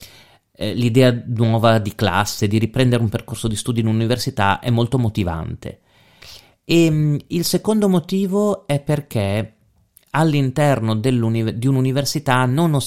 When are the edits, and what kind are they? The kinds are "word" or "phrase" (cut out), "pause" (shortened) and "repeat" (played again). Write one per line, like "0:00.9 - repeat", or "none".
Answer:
none